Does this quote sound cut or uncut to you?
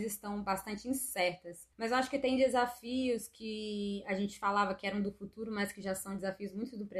cut